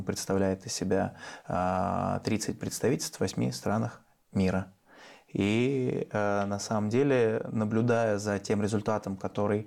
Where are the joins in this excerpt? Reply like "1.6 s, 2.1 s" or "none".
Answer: none